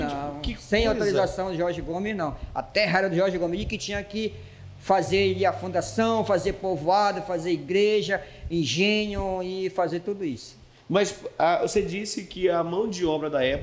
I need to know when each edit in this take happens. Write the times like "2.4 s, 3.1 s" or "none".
none